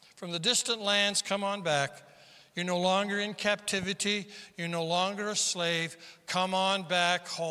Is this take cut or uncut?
uncut